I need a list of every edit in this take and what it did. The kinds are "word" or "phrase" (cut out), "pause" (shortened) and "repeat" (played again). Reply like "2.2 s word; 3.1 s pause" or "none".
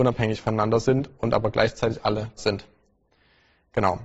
2.4 s word